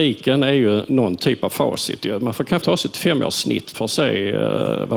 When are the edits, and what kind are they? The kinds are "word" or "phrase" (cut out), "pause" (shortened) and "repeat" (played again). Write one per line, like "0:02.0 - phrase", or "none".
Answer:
0:02.6 - word
0:03.7 - word